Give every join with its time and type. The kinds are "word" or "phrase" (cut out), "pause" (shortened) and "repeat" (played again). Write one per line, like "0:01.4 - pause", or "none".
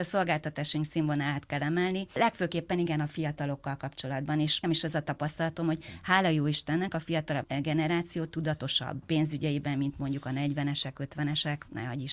0:04.6 - word
0:09.0 - word